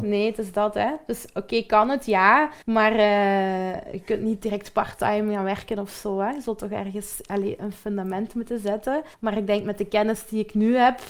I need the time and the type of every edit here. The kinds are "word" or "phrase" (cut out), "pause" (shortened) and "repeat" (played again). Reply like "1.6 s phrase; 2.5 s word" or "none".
2.6 s pause; 9.1 s pause